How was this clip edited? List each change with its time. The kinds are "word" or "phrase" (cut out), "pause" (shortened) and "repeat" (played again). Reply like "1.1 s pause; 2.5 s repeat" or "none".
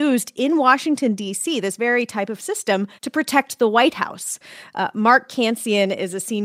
3.0 s pause